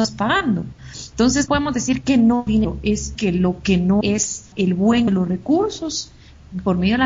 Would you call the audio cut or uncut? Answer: cut